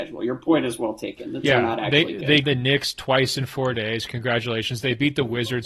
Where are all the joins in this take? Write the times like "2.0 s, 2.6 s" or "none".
1.4 s, 2.4 s